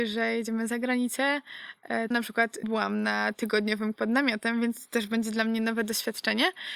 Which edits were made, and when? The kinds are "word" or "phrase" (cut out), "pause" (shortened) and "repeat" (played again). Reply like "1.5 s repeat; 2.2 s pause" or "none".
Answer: 2.1 s phrase; 2.6 s word; 3.9 s word